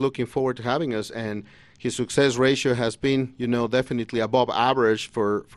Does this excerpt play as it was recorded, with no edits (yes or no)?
yes